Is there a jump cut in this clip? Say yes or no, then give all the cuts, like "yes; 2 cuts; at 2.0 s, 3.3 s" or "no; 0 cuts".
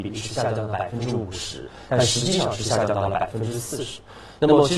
no; 0 cuts